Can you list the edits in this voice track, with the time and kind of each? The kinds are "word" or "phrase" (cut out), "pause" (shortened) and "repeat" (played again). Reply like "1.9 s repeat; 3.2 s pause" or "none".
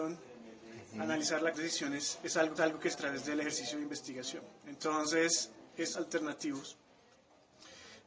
1.5 s phrase; 2.6 s repeat; 2.9 s word; 5.9 s word